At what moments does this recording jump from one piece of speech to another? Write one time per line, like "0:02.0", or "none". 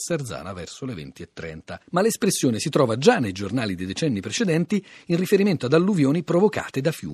0:01.8